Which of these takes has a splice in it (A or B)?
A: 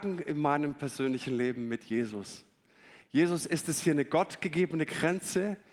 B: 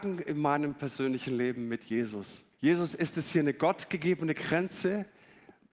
B